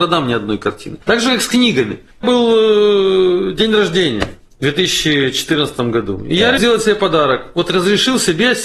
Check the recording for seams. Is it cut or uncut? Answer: cut